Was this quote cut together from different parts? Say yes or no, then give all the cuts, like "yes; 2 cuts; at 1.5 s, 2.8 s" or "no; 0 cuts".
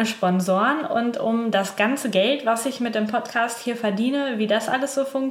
no; 0 cuts